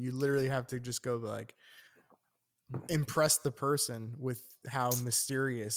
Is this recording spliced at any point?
no; 0 cuts

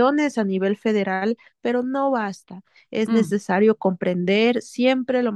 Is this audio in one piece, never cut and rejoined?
yes; 0 cuts

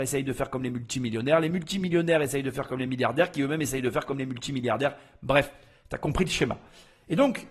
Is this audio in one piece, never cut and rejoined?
yes; 0 cuts

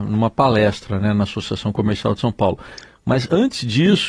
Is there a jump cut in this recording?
no; 0 cuts

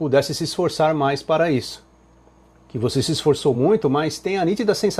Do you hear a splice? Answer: no; 0 cuts

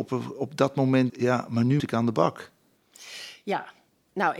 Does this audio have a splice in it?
yes; 2 cuts; at 1.1 s, 1.8 s

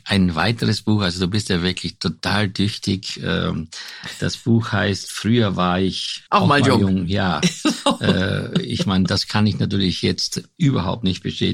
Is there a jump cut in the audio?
yes; 1 cut; at 6.3 s

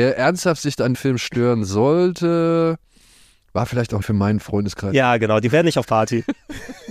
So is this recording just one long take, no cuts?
no; 3 cuts; at 0.9 s, 4.0 s, 5.8 s

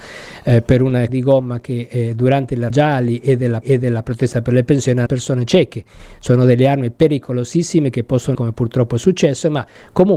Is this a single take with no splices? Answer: no; 5 cuts; at 1.1 s, 2.7 s, 3.6 s, 5.1 s, 8.4 s

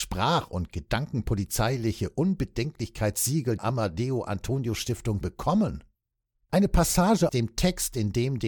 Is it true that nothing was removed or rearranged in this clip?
no; 3 cuts; at 3.6 s, 5.2 s, 7.3 s

